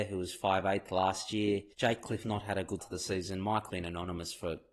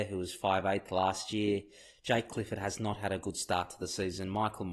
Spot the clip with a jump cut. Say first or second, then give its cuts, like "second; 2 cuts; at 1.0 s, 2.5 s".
first; 4 cuts; at 1.7 s, 2.2 s, 2.8 s, 3.7 s